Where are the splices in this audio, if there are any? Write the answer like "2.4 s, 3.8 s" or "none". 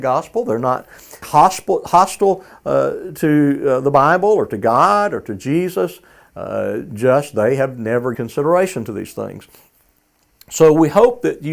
1.2 s, 8.1 s